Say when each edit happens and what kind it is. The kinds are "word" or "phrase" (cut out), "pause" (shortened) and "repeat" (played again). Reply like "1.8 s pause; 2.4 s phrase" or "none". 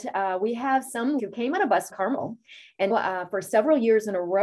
1.2 s word; 1.9 s phrase; 2.9 s word